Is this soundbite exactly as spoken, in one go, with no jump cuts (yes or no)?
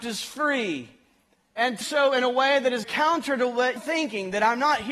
no